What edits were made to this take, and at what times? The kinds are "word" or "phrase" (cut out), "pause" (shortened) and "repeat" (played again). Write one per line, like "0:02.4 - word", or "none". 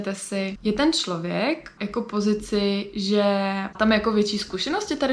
0:01.8 - word
0:03.7 - word